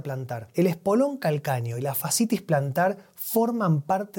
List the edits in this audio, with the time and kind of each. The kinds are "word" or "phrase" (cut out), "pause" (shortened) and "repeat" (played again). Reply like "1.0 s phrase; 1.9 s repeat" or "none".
none